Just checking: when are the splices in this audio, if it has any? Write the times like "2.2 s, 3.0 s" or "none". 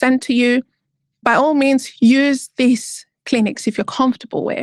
none